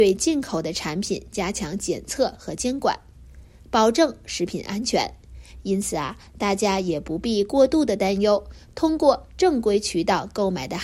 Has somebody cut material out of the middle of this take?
no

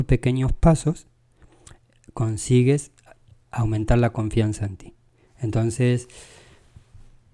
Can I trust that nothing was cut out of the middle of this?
yes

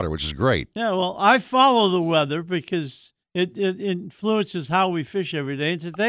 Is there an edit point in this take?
yes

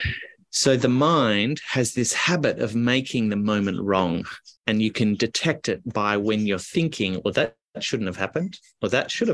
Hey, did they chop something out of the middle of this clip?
yes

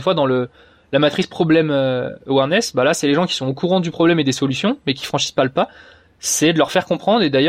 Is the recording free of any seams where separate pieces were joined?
yes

